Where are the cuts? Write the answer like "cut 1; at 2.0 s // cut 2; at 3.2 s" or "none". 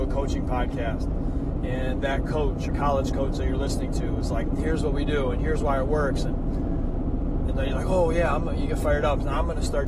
cut 1; at 2.7 s